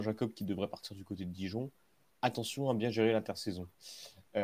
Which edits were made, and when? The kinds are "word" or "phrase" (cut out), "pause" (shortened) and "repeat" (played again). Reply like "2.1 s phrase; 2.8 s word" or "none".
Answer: none